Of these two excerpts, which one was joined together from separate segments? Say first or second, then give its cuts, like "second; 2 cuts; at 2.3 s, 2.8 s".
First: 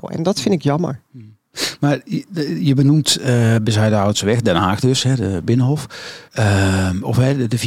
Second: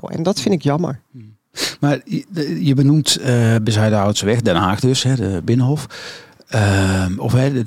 first; 1 cut; at 6.3 s